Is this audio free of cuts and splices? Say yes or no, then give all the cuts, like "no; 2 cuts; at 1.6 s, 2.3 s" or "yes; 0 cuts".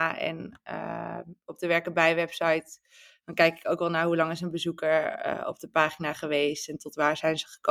yes; 0 cuts